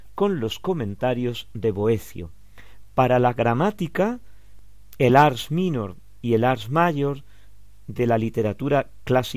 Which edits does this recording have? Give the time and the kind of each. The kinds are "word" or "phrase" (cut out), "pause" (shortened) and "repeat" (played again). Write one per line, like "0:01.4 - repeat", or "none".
none